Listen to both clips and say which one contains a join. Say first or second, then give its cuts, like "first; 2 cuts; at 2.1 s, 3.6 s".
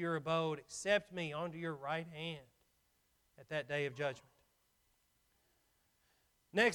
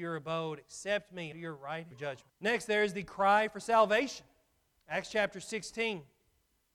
second; 3 cuts; at 1.3 s, 1.9 s, 2.3 s